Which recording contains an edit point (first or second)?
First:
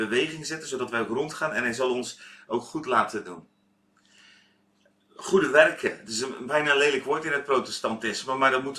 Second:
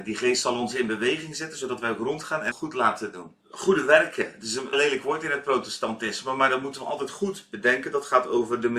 second